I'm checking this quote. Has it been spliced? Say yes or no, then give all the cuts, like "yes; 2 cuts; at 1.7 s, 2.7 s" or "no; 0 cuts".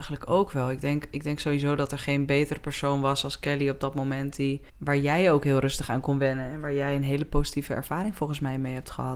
yes; 1 cut; at 4.7 s